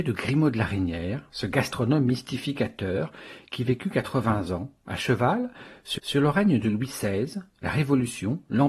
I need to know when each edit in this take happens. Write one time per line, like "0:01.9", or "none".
0:06.0